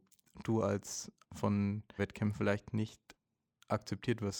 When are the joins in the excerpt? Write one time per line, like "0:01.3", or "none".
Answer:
0:01.2
0:02.0

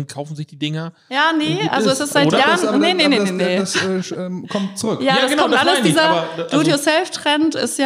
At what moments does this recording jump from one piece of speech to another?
0:01.0

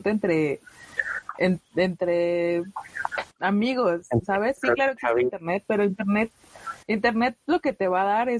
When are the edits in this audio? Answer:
0:03.3
0:04.6
0:06.8

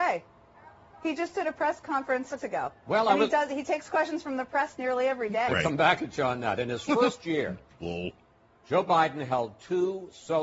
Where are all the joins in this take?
0:02.4
0:05.5

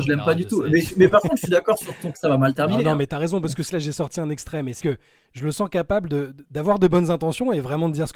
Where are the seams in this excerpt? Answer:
0:02.1
0:03.1
0:03.7
0:04.8

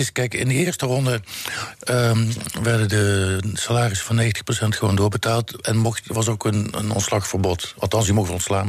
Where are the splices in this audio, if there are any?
none

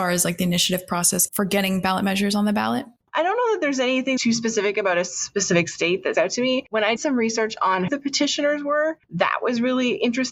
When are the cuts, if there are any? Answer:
0:01.3
0:04.2
0:06.1
0:07.0
0:07.9

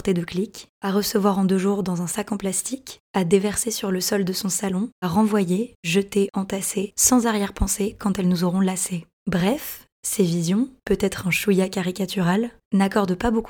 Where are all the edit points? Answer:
0:05.0
0:09.2

